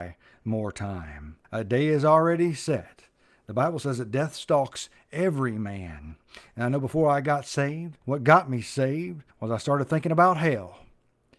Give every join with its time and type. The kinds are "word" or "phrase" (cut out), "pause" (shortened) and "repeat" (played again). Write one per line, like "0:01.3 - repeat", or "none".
0:01.4 - pause
0:08.0 - pause
0:09.3 - pause

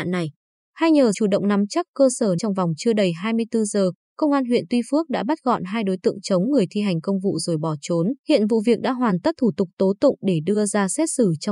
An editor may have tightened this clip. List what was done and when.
0:01.1 - word
0:02.4 - word
0:08.2 - pause
0:09.4 - word

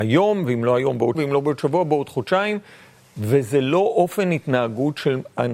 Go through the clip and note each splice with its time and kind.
0:01.1 - word

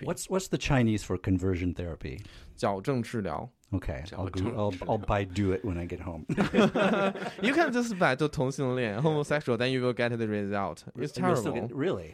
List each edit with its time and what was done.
none

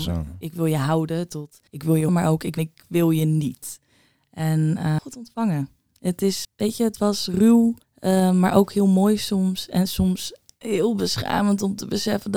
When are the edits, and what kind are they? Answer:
0:01.7 - pause
0:02.1 - word
0:02.6 - phrase
0:05.0 - phrase
0:06.4 - word
0:07.8 - pause

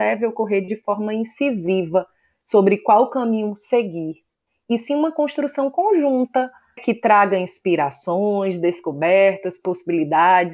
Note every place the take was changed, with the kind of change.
0:06.8 - word

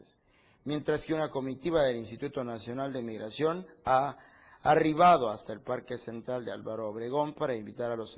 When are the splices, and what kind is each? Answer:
none

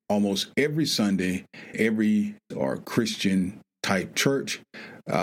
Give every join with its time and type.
0:01.7 - word
0:02.5 - word
0:04.1 - word

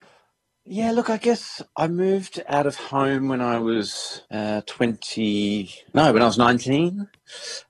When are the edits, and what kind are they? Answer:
0:01.7 - pause
0:04.2 - pause

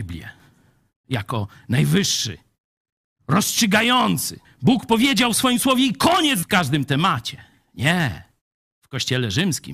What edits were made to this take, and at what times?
0:04.4 - word
0:06.4 - word

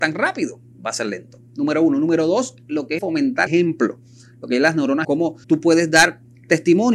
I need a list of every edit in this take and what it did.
0:03.0 - word
0:03.5 - word
0:05.0 - word
0:05.4 - pause

